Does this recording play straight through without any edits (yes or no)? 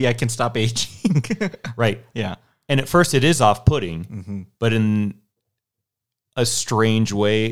yes